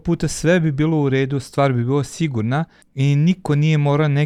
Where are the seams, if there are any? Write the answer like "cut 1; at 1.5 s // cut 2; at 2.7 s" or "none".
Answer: cut 1; at 2.8 s